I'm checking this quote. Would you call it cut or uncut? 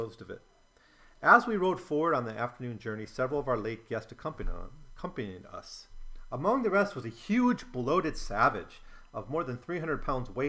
uncut